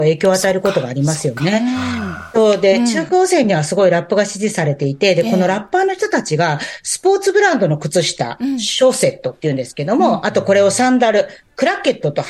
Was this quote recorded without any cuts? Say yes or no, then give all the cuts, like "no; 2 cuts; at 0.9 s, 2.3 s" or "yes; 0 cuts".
yes; 0 cuts